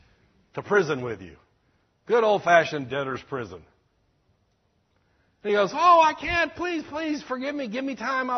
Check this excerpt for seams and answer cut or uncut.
uncut